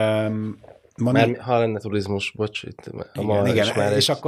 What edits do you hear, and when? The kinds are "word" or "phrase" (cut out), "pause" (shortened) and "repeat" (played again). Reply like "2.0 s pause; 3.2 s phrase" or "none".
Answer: none